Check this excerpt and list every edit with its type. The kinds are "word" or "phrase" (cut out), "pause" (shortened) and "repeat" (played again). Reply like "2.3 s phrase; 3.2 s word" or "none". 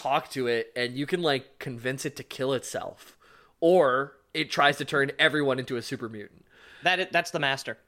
none